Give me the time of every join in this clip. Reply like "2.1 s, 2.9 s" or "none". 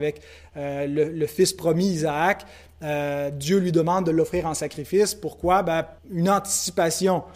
6.0 s